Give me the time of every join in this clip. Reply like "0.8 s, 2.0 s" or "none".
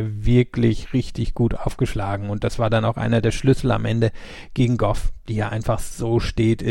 none

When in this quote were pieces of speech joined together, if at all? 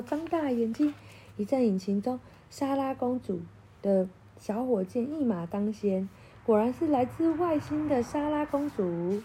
none

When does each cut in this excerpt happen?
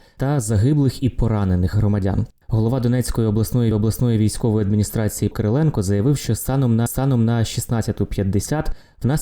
1.7 s, 3.7 s, 5.3 s, 6.9 s

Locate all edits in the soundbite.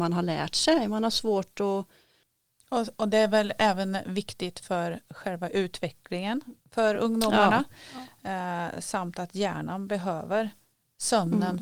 none

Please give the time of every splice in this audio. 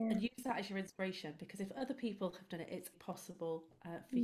2.9 s

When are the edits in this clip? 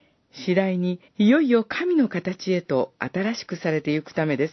1.1 s

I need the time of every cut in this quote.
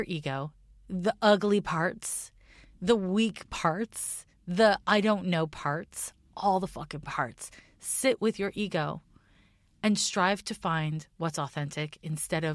none

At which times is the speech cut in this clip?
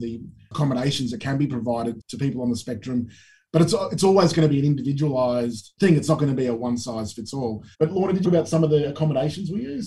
2.0 s, 7.7 s, 8.2 s

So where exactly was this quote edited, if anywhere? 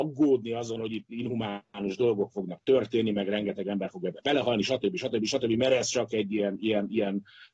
none

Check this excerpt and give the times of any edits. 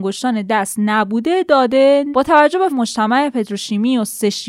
2.1 s, 2.7 s

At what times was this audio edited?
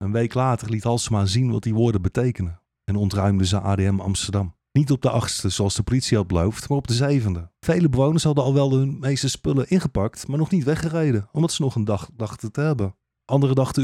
4.7 s, 7.6 s

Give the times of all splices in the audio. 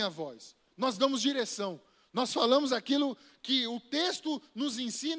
none

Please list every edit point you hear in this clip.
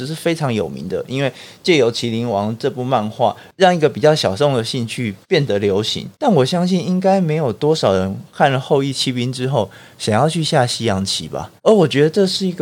5.2 s, 6.1 s, 11.6 s

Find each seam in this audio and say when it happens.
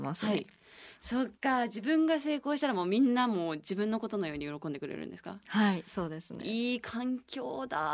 1.4 s

